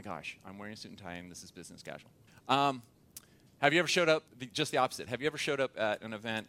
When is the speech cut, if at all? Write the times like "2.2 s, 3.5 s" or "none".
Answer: 2.3 s, 4.3 s